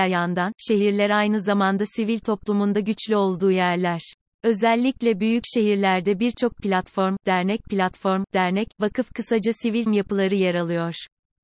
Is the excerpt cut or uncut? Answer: cut